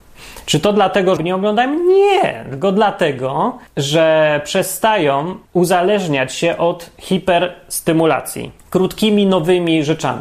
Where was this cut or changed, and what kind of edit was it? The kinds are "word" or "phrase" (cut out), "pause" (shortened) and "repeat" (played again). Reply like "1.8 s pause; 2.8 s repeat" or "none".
1.2 s phrase; 3.7 s pause; 5.5 s pause; 8.6 s pause